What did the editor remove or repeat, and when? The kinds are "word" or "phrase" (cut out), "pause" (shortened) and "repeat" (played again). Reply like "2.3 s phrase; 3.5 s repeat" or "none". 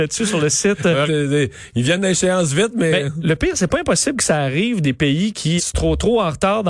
1.1 s word; 5.6 s word

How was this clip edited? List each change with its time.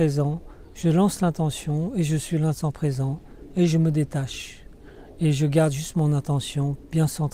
none

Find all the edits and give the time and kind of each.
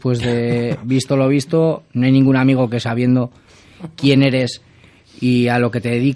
none

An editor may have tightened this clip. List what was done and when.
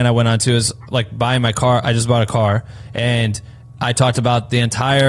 none

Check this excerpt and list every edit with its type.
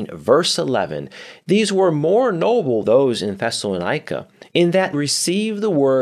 2.8 s word; 4.9 s word

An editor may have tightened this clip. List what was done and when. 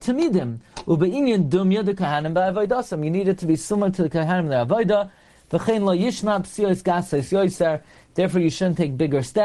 none

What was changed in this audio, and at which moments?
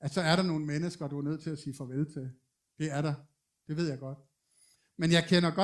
none

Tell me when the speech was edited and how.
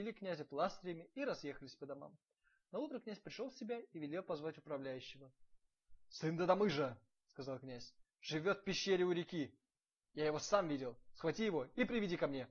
none

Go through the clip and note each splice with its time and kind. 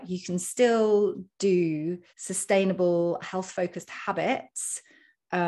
2.1 s pause

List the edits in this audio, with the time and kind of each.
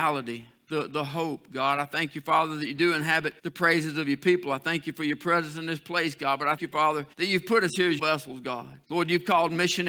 3.4 s pause; 6.6 s word; 7.1 s pause; 8.0 s word; 8.8 s pause

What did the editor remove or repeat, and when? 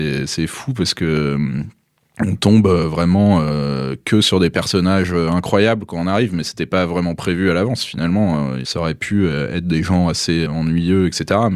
10.5 s word

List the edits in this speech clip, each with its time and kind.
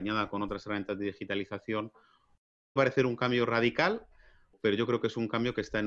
2.8 s word

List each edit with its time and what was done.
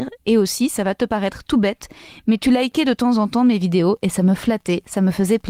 none

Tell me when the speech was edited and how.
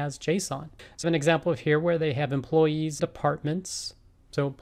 1.0 s phrase; 3.0 s word

